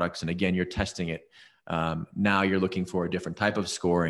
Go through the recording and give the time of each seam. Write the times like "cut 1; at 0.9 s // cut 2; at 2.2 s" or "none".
none